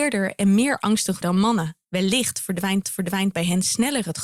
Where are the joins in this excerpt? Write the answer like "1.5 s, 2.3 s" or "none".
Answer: 1.2 s, 1.8 s, 2.8 s